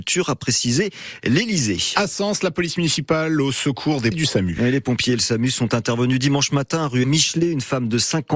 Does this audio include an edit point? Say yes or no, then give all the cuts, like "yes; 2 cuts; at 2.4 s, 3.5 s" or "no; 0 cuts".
yes; 2 cuts; at 4.1 s, 7.0 s